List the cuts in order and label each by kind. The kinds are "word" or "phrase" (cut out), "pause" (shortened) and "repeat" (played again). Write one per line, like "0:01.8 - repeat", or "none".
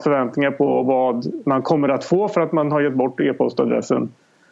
none